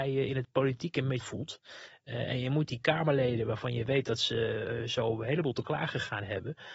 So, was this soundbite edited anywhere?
yes; 1 cut; at 1.2 s

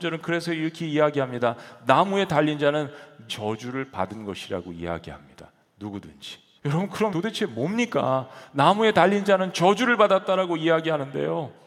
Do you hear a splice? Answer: yes; 3 cuts; at 3.3 s, 6.6 s, 7.1 s

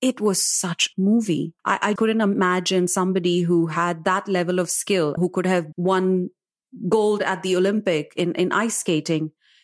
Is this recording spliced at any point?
yes; 5 cuts; at 0.9 s, 1.6 s, 2.0 s, 5.2 s, 5.7 s

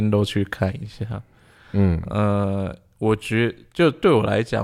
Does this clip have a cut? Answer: no; 0 cuts

